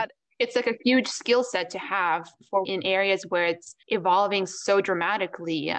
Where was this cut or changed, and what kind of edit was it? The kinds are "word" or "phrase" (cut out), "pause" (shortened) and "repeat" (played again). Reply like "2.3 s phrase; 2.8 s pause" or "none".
2.6 s phrase; 3.8 s pause